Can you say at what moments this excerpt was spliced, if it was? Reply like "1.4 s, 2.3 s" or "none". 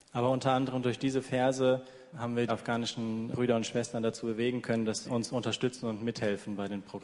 2.1 s, 2.5 s, 3.3 s, 5.0 s